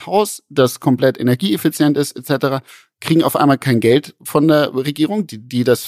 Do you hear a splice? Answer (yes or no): no